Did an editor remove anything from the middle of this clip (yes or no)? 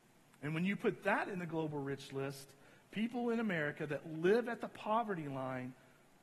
no